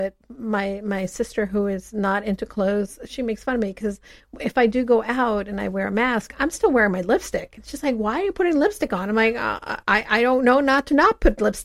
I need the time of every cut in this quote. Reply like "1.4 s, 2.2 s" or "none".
none